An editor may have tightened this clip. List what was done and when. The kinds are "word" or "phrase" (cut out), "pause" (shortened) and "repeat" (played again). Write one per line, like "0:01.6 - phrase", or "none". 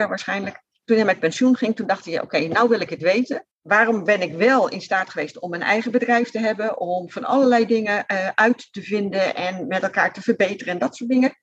0:03.5 - pause